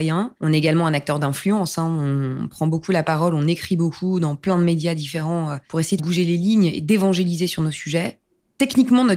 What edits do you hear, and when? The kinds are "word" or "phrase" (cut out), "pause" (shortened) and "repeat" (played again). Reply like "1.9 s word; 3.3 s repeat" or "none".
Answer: 6.0 s word